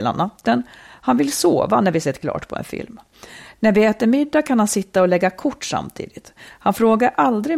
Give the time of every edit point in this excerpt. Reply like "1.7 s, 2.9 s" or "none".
none